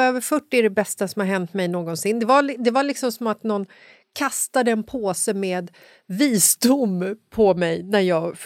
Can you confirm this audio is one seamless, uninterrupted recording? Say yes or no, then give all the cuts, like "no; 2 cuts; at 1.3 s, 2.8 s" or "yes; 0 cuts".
yes; 0 cuts